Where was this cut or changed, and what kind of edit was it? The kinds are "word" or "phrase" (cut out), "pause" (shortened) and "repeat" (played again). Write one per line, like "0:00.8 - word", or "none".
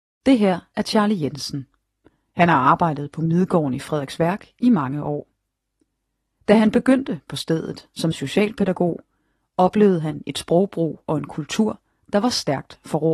0:08.1 - word